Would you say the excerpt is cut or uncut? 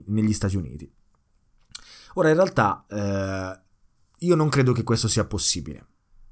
uncut